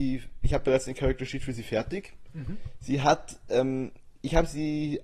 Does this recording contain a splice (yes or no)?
no